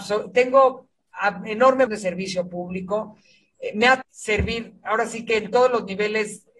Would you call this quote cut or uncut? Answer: cut